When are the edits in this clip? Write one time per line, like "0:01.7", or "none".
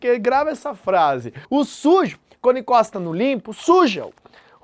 none

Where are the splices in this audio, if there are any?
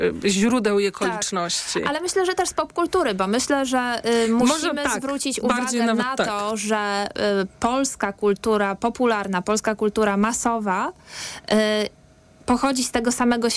none

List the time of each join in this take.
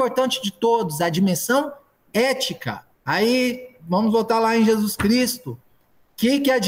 0:02.9

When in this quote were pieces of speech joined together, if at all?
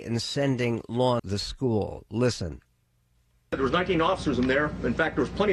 0:01.2

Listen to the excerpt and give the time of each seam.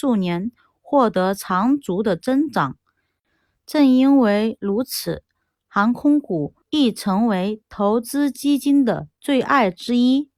0:06.6

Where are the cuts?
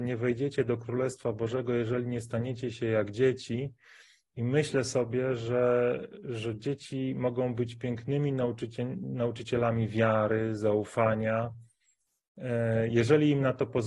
none

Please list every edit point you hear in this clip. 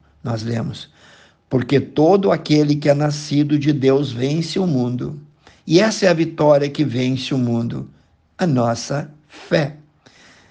none

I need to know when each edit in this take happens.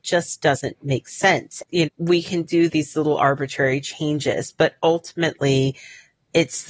0:01.9
0:02.7

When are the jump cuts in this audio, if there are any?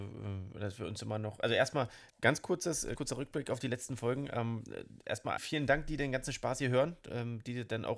0:02.1
0:03.0
0:05.4

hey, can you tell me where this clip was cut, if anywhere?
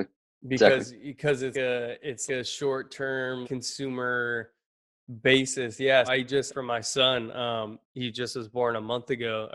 0:01.5
0:02.3
0:03.4
0:06.0
0:06.5
0:07.8

